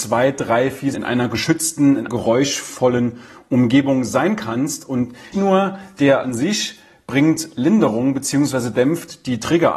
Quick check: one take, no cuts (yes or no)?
no